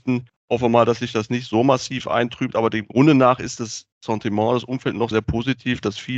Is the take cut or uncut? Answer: cut